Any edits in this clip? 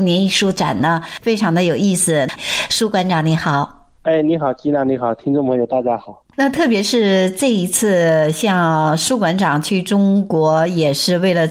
yes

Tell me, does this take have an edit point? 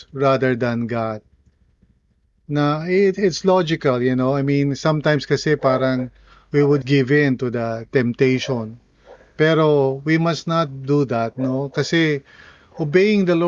yes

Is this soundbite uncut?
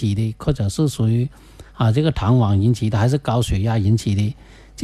no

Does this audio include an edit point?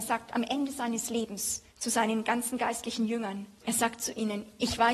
yes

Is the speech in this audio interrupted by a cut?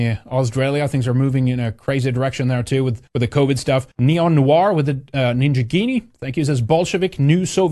yes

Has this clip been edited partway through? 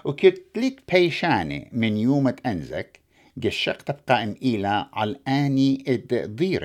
no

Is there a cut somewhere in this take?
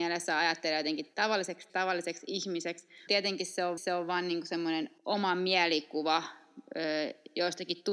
yes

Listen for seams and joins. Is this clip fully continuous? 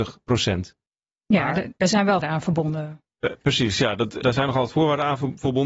no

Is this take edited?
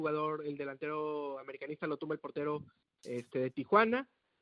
no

